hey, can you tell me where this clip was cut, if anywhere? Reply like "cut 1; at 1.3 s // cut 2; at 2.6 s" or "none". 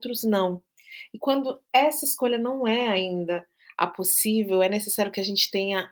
none